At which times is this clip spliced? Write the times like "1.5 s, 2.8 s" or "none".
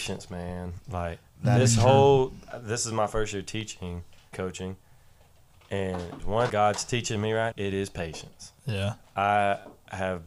4.3 s, 6.2 s, 6.5 s, 7.5 s